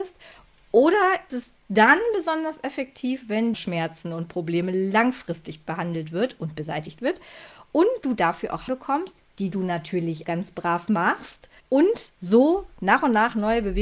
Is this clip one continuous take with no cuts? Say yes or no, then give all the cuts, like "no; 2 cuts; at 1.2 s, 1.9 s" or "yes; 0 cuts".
no; 5 cuts; at 1.3 s, 3.5 s, 8.7 s, 10.2 s, 11.6 s